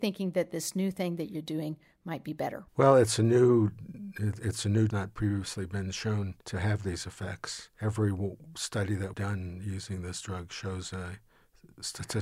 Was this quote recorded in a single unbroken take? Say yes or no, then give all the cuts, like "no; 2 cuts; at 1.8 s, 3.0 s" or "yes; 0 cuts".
no; 4 cuts; at 2.7 s, 4.9 s, 6.4 s, 9.1 s